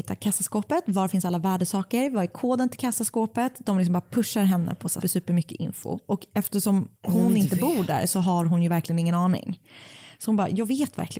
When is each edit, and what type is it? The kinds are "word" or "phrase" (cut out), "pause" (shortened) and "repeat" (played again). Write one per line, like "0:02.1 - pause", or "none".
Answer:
0:05.0 - word
0:07.0 - pause